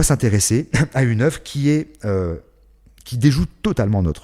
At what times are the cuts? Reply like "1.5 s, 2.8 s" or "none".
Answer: none